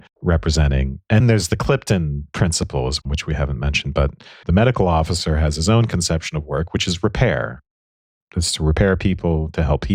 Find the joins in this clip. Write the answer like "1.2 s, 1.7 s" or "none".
1.2 s, 3.0 s